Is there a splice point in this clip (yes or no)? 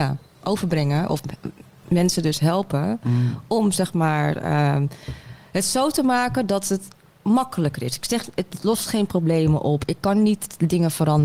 no